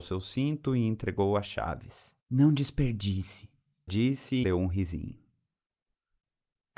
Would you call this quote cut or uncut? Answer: cut